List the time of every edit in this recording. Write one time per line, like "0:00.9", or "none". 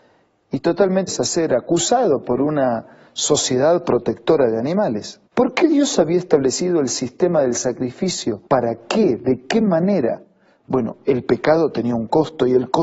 0:01.1
0:05.3
0:08.5